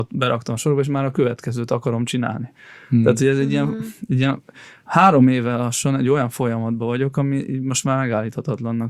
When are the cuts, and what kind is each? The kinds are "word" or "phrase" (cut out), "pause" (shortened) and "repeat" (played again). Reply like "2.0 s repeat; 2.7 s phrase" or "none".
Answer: none